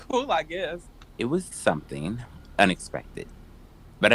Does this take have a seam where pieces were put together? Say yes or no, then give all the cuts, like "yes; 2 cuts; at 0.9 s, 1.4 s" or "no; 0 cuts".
yes; 3 cuts; at 1.1 s, 1.5 s, 2.5 s